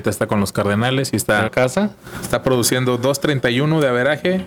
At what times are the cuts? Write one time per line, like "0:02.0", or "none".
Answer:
0:01.5